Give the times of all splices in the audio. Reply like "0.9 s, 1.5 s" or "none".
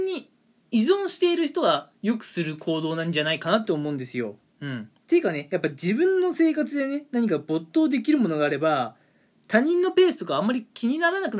5.0 s